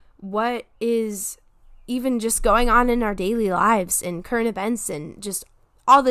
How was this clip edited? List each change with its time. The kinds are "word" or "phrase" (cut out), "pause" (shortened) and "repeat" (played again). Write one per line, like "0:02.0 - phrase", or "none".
none